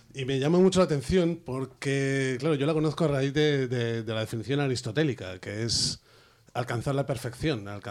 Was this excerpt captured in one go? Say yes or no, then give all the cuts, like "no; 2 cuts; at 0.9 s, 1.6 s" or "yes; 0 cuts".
yes; 0 cuts